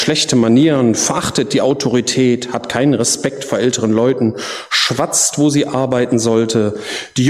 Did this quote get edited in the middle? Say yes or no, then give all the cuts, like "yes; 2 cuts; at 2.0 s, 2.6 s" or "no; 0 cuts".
no; 0 cuts